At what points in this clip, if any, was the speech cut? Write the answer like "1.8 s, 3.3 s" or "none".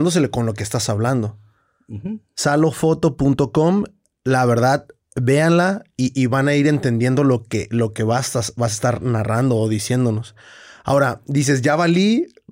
none